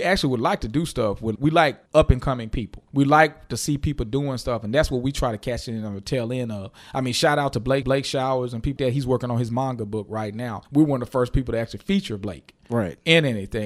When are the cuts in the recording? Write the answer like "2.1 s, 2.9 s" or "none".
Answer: 1.4 s, 1.9 s, 2.9 s, 7.8 s, 8.8 s, 10.6 s